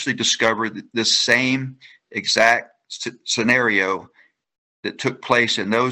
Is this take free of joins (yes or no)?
yes